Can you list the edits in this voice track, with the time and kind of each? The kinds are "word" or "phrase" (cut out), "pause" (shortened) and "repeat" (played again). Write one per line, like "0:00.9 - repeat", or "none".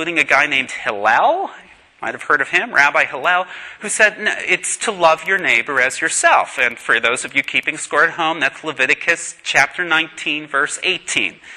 none

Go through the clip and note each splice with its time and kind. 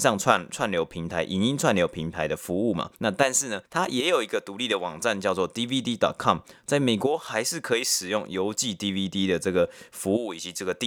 0:02.9 - pause
0:03.7 - pause

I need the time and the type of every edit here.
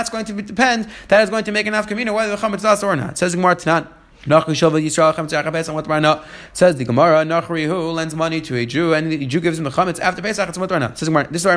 0:04.1 - pause

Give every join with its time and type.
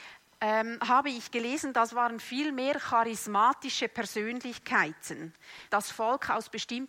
0:05.7 - word

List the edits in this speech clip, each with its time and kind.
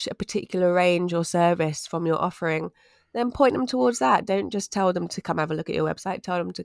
none

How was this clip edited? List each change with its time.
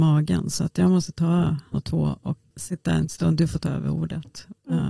0:01.7 - phrase
0:02.5 - word

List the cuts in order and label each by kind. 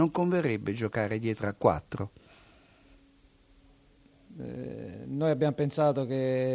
none

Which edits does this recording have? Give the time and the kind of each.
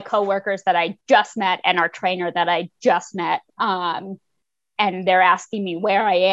0:01.0 - pause
0:03.5 - pause

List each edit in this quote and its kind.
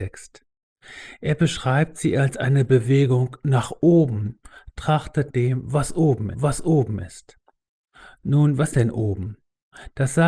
0:05.3 - word
0:06.3 - repeat
0:08.7 - word

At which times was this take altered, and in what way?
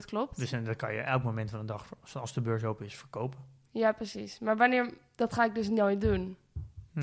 none

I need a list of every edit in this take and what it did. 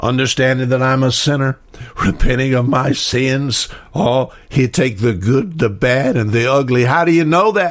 none

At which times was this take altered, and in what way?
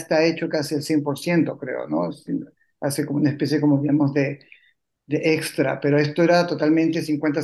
none

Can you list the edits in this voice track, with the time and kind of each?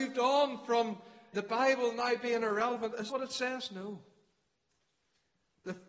0:01.3 - word
0:03.1 - word

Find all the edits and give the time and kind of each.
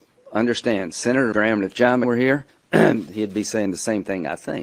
0:01.3 - word
0:02.0 - word
0:02.5 - pause

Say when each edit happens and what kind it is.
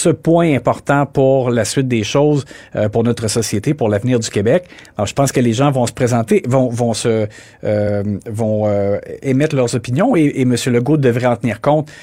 none

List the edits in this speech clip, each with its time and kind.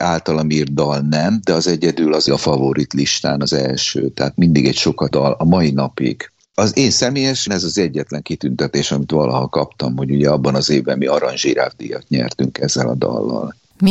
0:02.3 - word
0:05.1 - word
0:07.5 - word

